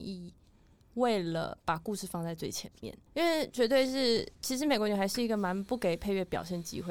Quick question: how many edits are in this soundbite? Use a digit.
2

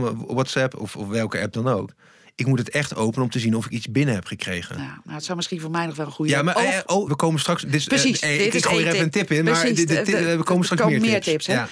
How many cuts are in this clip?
1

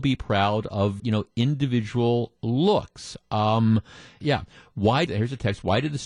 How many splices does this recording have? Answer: 3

